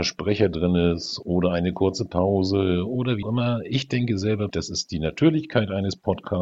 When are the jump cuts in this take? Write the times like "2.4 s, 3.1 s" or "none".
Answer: 3.2 s, 4.5 s